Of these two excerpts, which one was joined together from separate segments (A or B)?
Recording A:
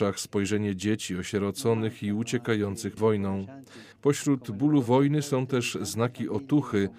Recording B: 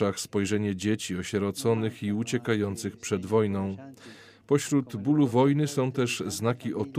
A